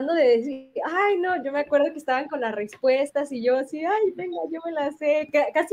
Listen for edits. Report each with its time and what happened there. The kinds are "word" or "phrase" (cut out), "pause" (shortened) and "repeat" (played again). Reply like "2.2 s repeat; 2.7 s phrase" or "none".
none